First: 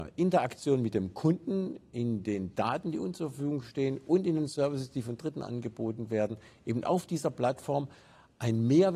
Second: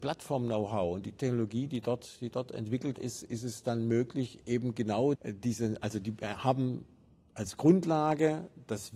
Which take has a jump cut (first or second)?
second